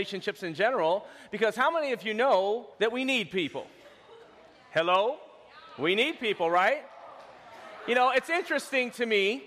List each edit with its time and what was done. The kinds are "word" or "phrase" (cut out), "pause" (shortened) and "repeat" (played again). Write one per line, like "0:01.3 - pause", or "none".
0:02.7 - pause